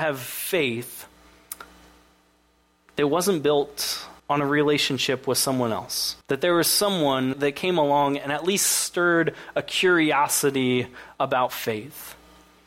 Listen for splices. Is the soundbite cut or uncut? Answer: cut